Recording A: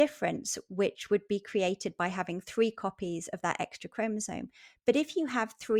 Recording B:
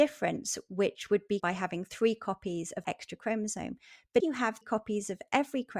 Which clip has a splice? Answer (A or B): B